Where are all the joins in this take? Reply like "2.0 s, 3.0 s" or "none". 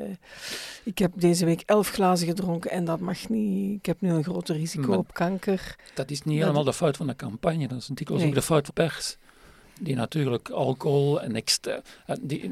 8.7 s, 11.2 s

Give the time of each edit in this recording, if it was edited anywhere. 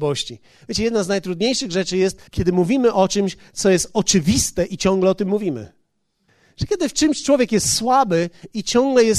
2.3 s, 6.3 s

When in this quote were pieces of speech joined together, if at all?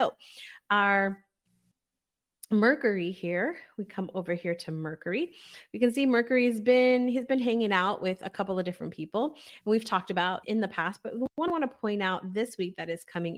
10.4 s

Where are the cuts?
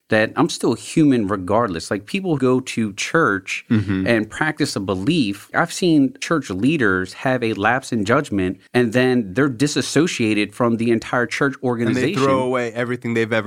2.4 s, 5.5 s, 8.7 s

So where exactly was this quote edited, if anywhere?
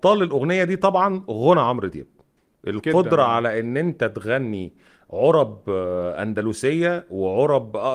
none

